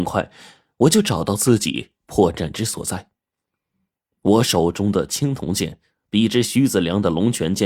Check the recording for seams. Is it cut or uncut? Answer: uncut